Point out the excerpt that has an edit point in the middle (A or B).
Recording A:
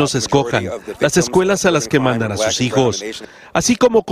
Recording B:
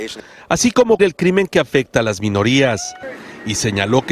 B